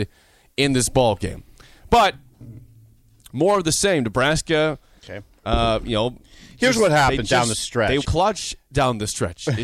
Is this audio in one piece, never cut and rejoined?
no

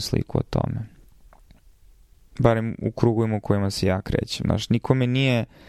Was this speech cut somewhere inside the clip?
no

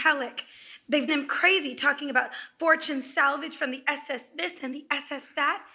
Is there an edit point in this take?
yes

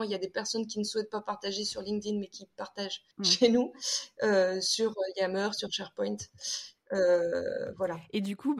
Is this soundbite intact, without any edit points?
no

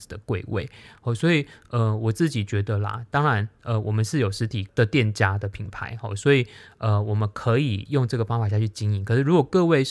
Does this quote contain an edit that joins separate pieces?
no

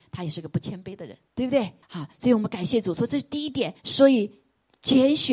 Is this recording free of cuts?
no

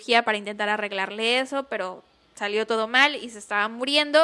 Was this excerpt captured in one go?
yes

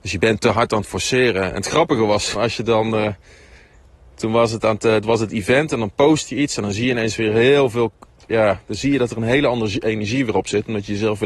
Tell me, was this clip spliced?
yes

